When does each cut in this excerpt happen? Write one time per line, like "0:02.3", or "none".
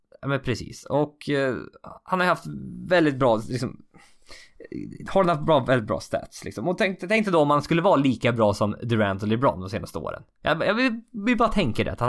none